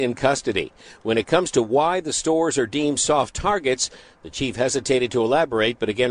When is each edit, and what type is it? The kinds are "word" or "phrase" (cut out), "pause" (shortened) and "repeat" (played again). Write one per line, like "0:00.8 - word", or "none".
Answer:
none